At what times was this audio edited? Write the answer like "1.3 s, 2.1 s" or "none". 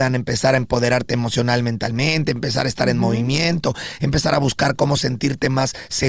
none